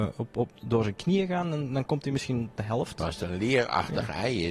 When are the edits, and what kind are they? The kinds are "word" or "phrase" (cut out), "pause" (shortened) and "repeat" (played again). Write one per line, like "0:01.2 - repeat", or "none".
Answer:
none